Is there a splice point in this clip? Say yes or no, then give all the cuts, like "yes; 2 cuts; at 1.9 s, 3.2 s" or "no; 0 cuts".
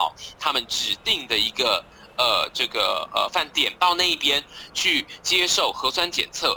yes; 1 cut; at 3.8 s